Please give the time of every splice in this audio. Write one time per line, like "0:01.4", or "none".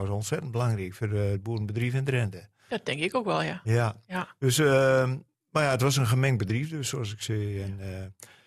none